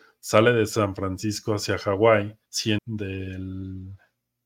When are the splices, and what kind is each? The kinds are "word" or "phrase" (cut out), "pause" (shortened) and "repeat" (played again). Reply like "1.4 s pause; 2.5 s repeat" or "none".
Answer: 2.5 s pause; 2.8 s phrase